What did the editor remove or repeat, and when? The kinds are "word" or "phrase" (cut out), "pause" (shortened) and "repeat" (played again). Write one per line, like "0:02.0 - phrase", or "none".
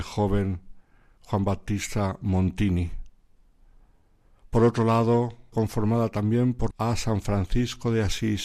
0:05.5 - phrase
0:06.7 - phrase